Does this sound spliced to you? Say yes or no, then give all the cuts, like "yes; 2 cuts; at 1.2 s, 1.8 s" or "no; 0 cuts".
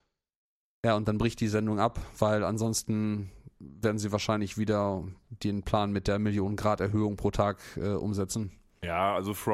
no; 0 cuts